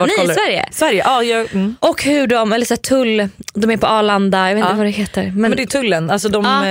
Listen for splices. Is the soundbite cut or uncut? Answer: cut